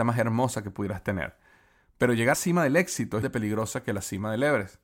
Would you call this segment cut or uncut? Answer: cut